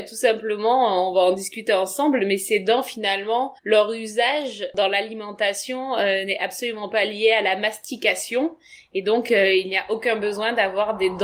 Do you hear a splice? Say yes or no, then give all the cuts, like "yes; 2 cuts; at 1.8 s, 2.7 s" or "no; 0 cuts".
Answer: yes; 1 cut; at 3.6 s